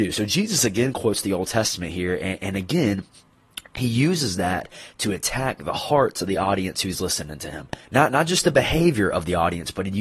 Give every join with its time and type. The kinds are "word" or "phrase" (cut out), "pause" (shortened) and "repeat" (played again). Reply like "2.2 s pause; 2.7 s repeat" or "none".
7.8 s pause